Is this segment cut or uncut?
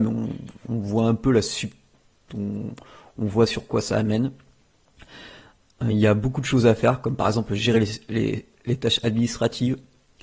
uncut